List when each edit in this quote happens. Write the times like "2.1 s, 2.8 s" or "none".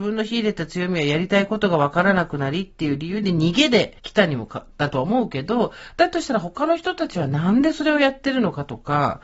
4.0 s